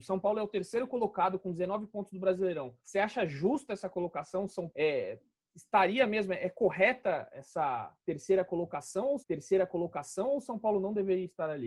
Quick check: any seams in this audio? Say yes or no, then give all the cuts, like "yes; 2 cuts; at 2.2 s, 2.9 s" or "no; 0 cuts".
yes; 3 cuts; at 2.8 s, 4.7 s, 9.2 s